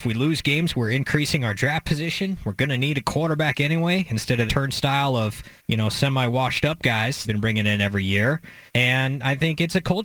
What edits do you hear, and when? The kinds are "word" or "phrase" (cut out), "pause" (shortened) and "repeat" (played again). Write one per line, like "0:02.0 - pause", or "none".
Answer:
0:04.5 - word
0:05.6 - pause
0:07.2 - phrase
0:08.7 - pause